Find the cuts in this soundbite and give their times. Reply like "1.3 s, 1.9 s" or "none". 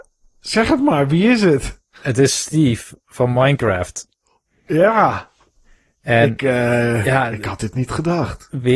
none